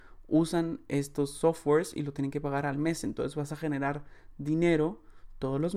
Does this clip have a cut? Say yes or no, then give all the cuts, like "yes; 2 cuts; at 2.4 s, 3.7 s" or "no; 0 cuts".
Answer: no; 0 cuts